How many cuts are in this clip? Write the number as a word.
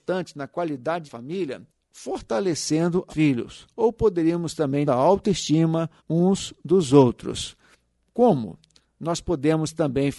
five